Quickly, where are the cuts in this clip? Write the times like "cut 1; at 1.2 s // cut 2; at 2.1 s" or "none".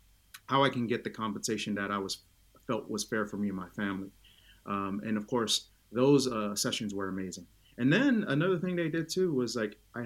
none